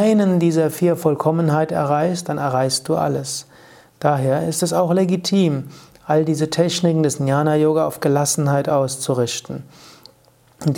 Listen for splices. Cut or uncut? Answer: uncut